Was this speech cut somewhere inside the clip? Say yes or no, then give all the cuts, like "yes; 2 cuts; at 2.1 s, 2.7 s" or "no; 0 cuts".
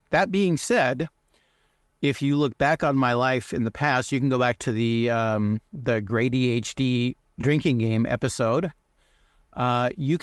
no; 0 cuts